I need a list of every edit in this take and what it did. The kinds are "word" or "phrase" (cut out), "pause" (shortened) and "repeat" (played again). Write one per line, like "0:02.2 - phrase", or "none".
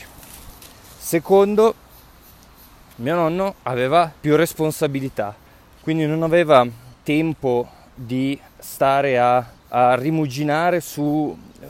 0:04.2 - pause
0:05.5 - pause
0:06.9 - pause
0:08.5 - pause
0:09.6 - pause